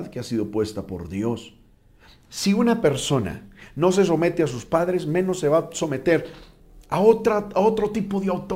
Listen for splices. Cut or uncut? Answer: uncut